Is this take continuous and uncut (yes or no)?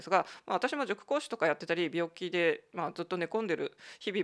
yes